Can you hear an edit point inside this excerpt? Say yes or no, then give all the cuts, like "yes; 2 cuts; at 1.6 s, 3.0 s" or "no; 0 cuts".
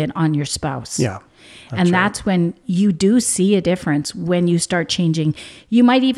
no; 0 cuts